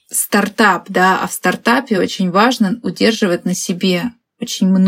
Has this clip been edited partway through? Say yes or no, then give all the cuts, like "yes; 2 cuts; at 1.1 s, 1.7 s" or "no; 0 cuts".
no; 0 cuts